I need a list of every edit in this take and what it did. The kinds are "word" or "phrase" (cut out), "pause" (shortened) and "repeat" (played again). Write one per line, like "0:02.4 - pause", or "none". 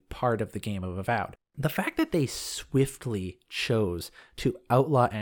0:01.4 - pause